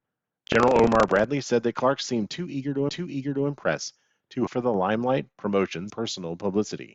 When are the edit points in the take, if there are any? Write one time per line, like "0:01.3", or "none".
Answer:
0:02.9
0:04.5
0:05.9